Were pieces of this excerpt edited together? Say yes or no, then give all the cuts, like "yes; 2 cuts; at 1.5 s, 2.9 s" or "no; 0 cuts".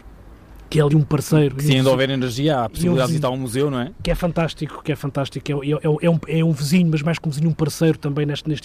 yes; 2 cuts; at 0.9 s, 3.1 s